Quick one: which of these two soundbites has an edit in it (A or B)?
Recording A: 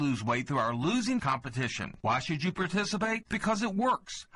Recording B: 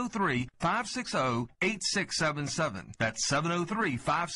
A